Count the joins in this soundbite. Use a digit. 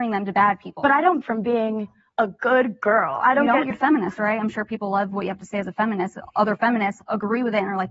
2